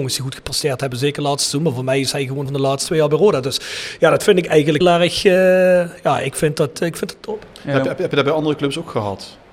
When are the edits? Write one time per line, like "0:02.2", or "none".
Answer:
0:02.5
0:04.8